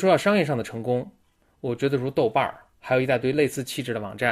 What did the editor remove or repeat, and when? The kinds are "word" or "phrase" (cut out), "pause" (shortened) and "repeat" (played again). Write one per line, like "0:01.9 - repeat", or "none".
0:02.7 - pause